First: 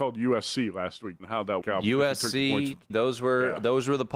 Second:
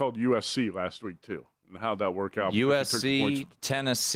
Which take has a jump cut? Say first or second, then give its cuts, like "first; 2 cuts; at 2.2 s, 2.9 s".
first; 3 cuts; at 1.2 s, 1.6 s, 2.9 s